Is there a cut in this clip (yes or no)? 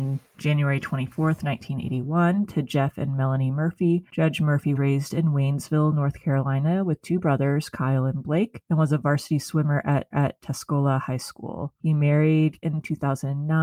yes